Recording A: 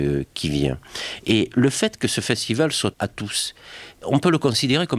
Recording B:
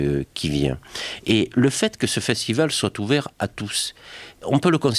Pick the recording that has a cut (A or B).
A